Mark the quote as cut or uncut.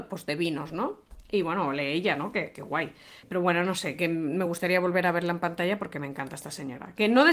uncut